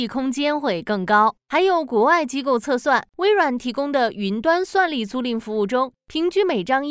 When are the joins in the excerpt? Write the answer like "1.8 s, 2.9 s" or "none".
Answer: 1.4 s, 3.1 s